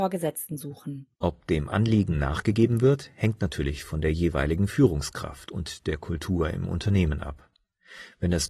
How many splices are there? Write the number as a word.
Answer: one